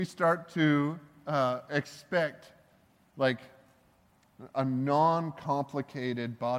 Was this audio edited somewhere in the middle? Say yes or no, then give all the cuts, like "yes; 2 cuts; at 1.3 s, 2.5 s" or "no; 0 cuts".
no; 0 cuts